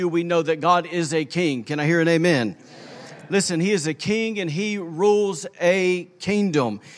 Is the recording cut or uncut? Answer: uncut